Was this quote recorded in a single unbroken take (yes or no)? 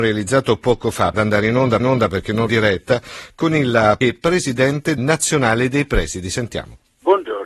no